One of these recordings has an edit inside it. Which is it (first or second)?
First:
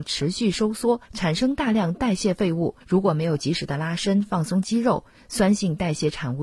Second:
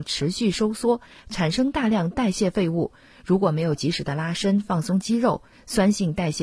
first